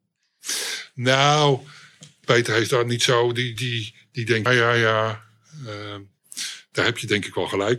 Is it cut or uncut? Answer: cut